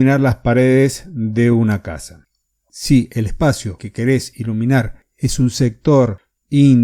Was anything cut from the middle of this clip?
no; 0 cuts

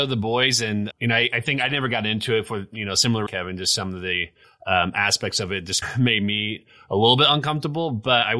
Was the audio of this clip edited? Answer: yes; 4 cuts; at 0.9 s, 3.3 s, 4.4 s, 5.8 s

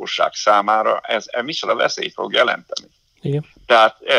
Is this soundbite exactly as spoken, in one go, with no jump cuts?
yes; 0 cuts

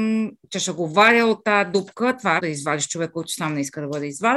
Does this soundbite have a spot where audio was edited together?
yes; 1 cut; at 2.4 s

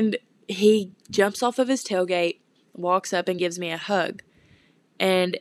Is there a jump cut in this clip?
no; 0 cuts

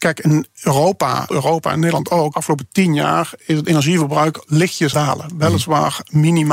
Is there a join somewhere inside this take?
yes; 3 cuts; at 1.3 s, 2.3 s, 4.9 s

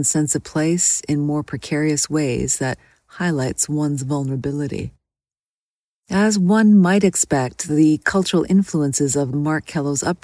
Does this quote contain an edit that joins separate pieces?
yes; 1 cut; at 9.3 s

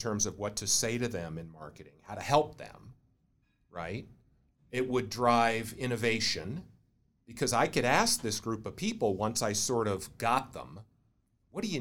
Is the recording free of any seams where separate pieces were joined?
yes; 0 cuts

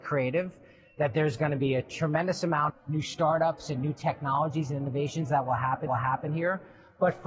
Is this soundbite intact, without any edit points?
no; 2 cuts; at 2.7 s, 5.9 s

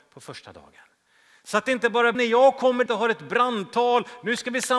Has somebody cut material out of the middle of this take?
yes; 2 cuts; at 2.1 s, 2.9 s

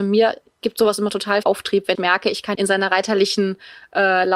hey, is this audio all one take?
no; 3 cuts; at 1.4 s, 1.9 s, 2.5 s

